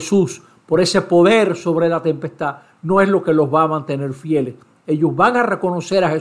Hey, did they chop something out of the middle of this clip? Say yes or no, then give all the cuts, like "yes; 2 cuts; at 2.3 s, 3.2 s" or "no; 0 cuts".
no; 0 cuts